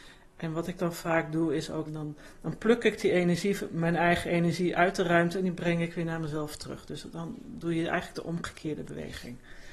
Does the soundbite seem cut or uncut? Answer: cut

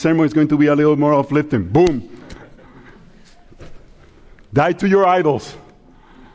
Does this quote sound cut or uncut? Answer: uncut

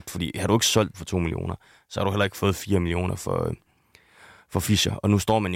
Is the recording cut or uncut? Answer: cut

